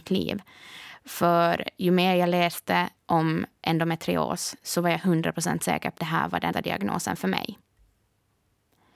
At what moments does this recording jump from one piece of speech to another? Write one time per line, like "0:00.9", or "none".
0:03.0
0:06.0
0:06.5